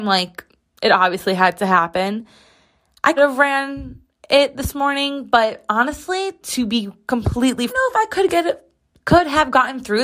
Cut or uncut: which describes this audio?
cut